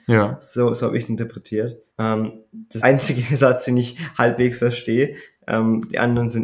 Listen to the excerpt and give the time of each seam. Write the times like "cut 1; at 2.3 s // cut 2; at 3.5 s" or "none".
cut 1; at 1.9 s // cut 2; at 2.8 s